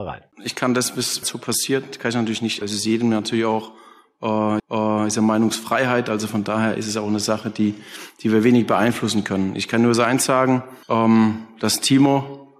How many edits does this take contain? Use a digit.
4